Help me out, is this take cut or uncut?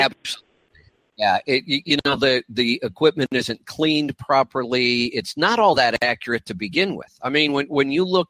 uncut